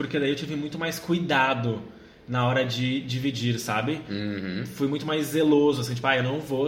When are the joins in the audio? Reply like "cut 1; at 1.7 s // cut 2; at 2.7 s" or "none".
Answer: none